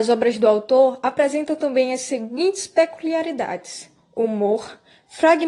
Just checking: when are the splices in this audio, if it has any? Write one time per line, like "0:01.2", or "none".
none